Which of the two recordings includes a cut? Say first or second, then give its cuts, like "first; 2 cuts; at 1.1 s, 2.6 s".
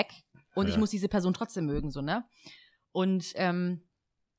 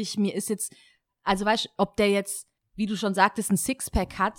second; 1 cut; at 2.6 s